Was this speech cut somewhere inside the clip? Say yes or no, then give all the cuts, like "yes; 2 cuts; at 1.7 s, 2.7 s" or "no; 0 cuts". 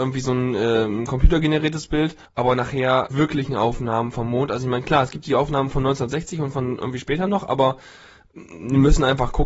yes; 2 cuts; at 2.3 s, 3.1 s